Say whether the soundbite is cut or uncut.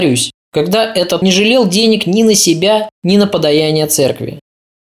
cut